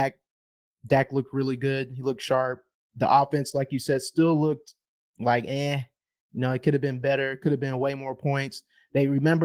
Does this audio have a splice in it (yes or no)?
no